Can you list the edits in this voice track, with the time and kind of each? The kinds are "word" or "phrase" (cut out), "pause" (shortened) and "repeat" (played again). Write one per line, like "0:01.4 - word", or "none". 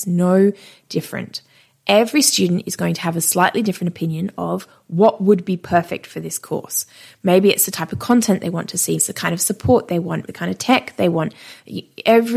0:09.0 - word
0:10.3 - phrase